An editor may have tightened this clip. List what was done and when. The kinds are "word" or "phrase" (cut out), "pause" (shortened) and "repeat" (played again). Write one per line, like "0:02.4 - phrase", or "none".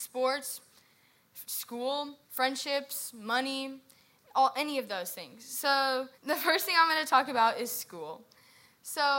0:02.2 - pause
0:06.1 - pause